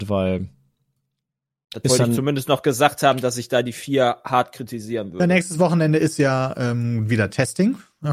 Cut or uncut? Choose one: uncut